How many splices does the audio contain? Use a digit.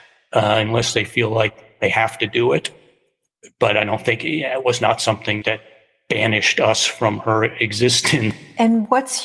1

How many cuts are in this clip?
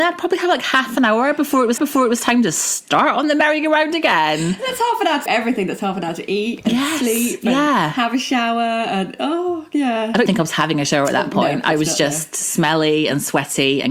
3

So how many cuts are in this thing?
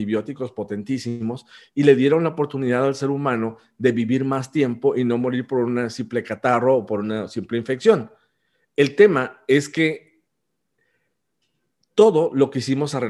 0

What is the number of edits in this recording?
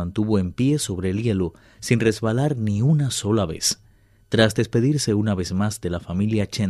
0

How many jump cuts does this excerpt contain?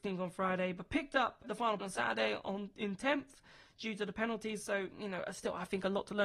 2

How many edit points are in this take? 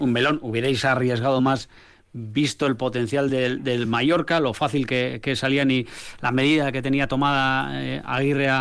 0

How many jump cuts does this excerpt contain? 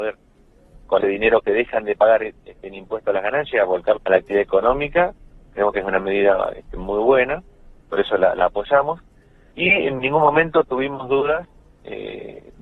2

